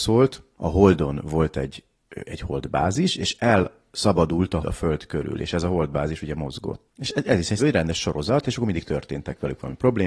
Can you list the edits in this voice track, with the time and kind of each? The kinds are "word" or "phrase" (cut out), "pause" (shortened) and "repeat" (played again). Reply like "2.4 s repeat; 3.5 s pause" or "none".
2.3 s word; 4.6 s word; 7.6 s word